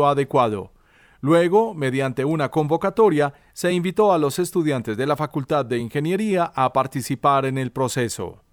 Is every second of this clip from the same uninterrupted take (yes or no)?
yes